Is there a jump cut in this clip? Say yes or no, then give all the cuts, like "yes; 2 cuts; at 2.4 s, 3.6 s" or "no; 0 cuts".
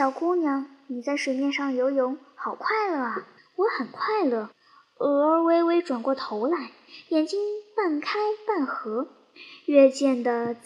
yes; 2 cuts; at 3.4 s, 4.5 s